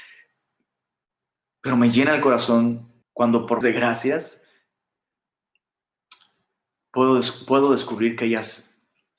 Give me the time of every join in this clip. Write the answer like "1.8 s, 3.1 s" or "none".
3.0 s, 3.6 s